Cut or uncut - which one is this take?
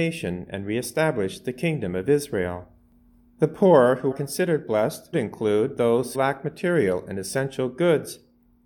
cut